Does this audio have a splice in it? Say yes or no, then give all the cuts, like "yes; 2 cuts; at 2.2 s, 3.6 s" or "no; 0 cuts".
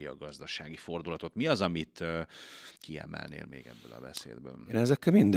yes; 1 cut; at 2.8 s